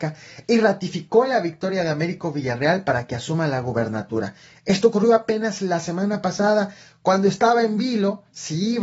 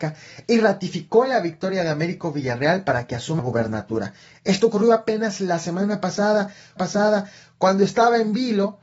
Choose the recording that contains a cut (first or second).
second